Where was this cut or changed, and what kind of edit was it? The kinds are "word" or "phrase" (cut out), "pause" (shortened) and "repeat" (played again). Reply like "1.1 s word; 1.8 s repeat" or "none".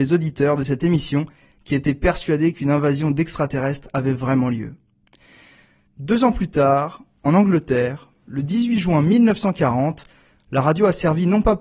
none